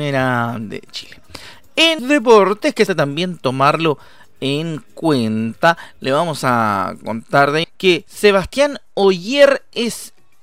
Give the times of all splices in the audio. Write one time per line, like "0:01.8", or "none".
0:02.0
0:02.9
0:07.6